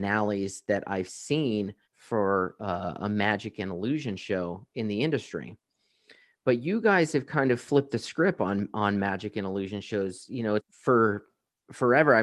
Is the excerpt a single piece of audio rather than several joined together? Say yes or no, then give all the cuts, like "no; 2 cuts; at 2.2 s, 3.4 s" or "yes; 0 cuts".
no; 2 cuts; at 1.8 s, 10.6 s